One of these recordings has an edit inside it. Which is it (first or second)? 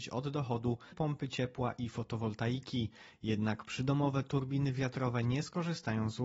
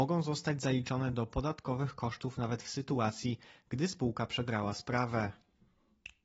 first